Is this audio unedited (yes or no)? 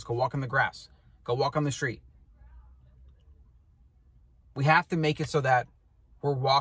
yes